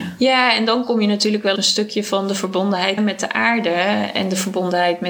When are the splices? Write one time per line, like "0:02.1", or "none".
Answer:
0:01.6
0:03.0